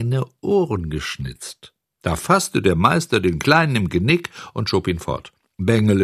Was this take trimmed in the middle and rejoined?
yes; 1 cut; at 1.8 s

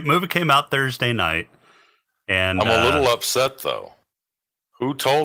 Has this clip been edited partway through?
no; 0 cuts

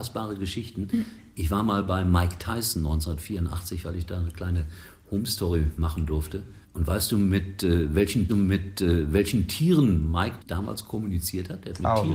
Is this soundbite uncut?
no; 3 cuts; at 6.6 s, 8.3 s, 10.4 s

